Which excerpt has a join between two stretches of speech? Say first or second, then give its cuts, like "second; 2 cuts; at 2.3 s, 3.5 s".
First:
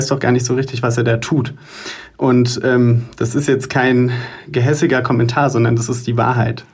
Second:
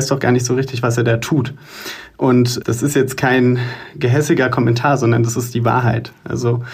second; 1 cut; at 2.6 s